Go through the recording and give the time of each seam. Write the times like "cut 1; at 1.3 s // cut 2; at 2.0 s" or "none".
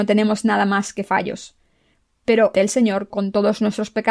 cut 1; at 2.5 s // cut 2; at 3.1 s